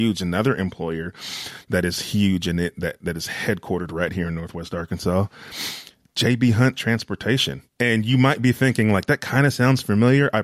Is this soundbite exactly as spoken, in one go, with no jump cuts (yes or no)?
no